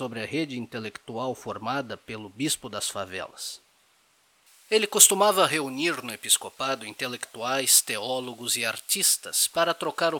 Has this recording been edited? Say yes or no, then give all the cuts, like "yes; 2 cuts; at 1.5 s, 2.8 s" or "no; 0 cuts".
no; 0 cuts